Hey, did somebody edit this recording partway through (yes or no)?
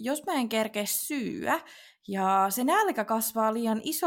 no